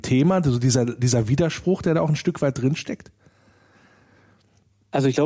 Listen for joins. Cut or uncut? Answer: uncut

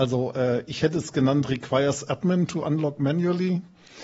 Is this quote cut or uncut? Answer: uncut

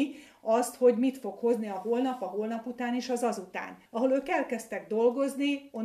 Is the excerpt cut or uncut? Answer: cut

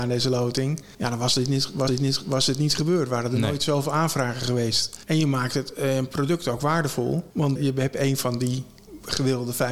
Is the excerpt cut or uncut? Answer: cut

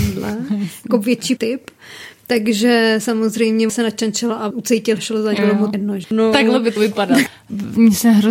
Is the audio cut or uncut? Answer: cut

